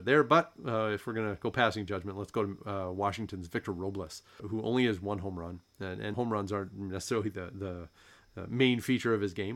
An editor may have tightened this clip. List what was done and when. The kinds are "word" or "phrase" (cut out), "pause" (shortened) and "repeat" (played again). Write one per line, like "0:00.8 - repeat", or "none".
0:04.4 - word
0:06.1 - word